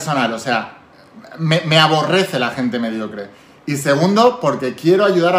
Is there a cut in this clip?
no; 0 cuts

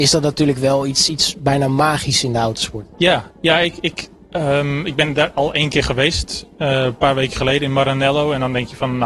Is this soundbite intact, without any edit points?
no; 1 cut; at 2.9 s

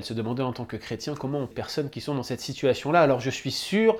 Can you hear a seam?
yes; 1 cut; at 1.5 s

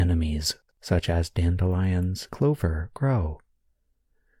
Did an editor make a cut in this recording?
yes; 1 cut; at 2.3 s

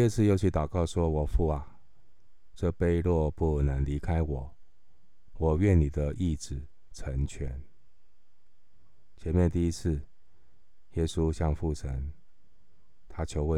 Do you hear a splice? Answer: yes; 1 cut; at 5.3 s

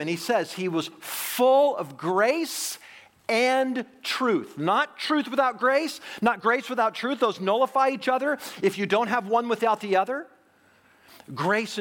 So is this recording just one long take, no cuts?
yes; 0 cuts

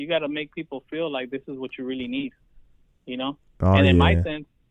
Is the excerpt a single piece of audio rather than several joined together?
yes; 0 cuts

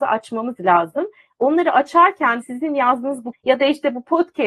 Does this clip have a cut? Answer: yes; 2 cuts; at 2.4 s, 3.3 s

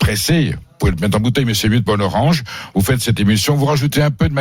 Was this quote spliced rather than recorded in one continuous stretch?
yes; 1 cut; at 1.9 s

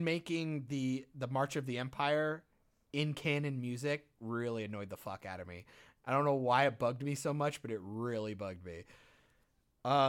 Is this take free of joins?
yes; 0 cuts

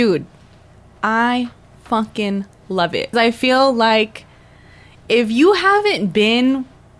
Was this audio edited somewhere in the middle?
yes; 1 cut; at 3.1 s

